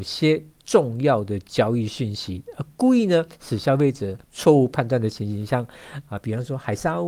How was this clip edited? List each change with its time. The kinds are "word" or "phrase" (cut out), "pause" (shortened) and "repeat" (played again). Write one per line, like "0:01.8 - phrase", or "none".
0:04.2 - pause